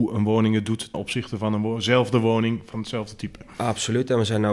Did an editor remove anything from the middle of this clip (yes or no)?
yes